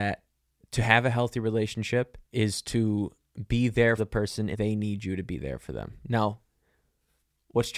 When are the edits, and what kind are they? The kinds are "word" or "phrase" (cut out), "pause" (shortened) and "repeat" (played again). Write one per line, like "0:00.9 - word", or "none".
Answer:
0:02.2 - pause
0:04.0 - word
0:04.5 - phrase